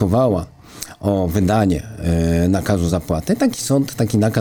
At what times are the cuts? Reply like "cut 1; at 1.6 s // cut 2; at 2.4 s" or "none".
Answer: none